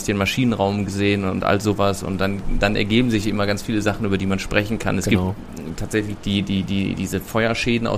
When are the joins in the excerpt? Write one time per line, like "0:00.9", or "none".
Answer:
0:02.6
0:06.2